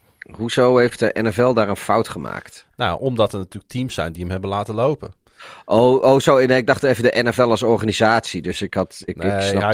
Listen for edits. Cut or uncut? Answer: uncut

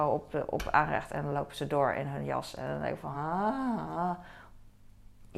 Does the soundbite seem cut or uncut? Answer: uncut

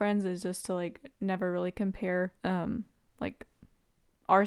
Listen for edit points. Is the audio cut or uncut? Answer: cut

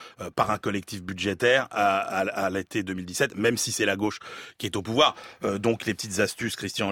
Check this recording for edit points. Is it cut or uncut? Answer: uncut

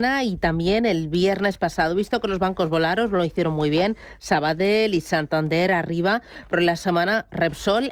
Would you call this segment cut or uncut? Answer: uncut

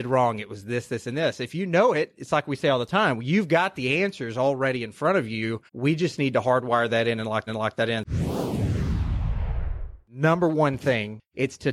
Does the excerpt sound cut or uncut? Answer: cut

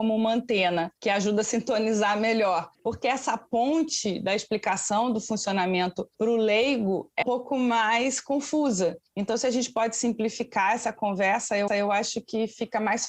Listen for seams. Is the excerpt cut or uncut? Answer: cut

